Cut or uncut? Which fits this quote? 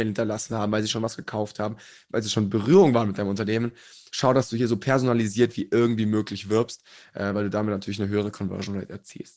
uncut